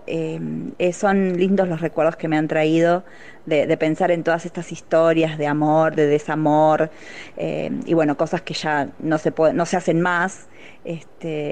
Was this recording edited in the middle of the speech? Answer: no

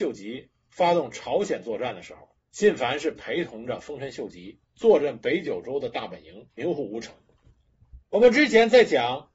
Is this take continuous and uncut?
no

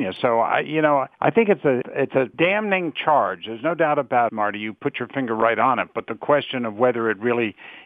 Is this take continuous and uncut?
no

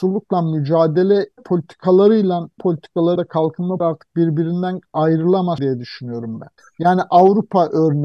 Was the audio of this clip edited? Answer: yes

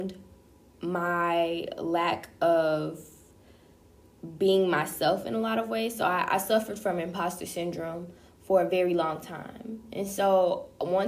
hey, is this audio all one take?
yes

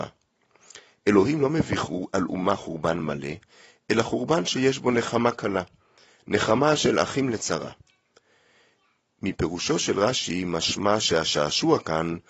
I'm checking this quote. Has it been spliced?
no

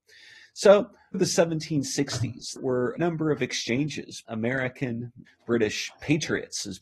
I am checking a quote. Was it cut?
yes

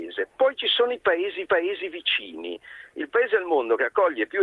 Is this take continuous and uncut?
no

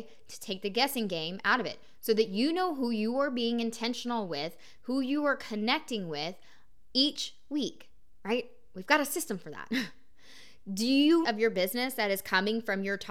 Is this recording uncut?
no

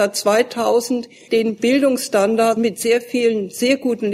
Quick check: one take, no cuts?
no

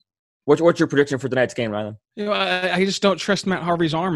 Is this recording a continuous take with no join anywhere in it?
no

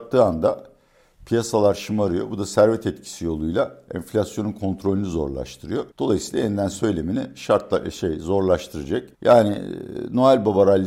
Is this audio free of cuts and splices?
no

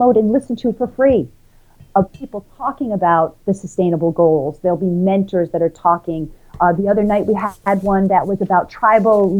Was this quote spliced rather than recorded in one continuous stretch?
no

